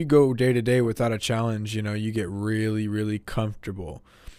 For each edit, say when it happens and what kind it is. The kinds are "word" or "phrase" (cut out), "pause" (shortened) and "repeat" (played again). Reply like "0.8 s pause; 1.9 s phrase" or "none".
none